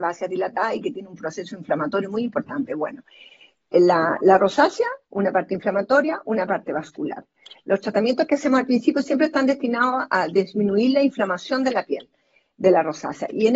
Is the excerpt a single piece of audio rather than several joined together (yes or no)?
yes